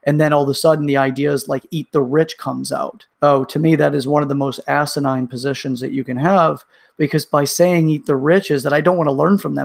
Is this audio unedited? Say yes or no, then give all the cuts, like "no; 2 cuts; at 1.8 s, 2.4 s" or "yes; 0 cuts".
no; 1 cut; at 3.1 s